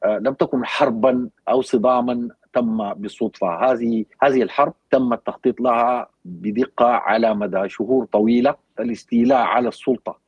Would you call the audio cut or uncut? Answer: cut